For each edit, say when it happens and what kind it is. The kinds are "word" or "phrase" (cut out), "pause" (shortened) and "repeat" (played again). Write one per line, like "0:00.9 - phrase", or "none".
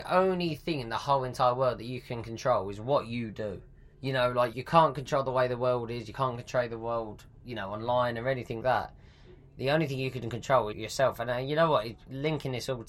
0:03.9 - pause
0:04.5 - word
0:08.6 - word
0:10.7 - phrase